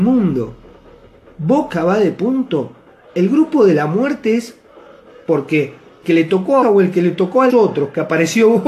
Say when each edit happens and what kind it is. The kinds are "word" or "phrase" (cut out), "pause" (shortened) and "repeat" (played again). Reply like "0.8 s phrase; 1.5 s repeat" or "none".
6.0 s word; 6.6 s word; 7.5 s word